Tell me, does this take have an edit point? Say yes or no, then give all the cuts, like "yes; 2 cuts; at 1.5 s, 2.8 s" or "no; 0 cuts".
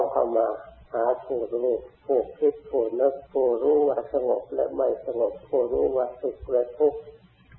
yes; 2 cuts; at 1.9 s, 3.3 s